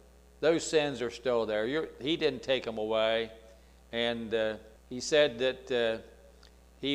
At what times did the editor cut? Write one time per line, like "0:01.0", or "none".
0:04.8